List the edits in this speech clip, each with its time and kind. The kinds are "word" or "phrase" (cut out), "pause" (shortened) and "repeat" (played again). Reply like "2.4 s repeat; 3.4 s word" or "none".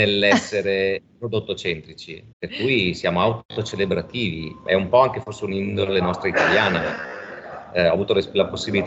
2.3 s pause